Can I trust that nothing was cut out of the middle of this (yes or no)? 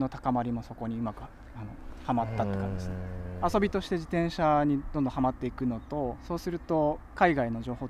no